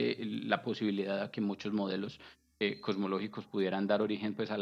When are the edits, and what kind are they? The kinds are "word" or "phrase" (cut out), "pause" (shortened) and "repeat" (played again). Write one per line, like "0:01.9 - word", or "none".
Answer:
none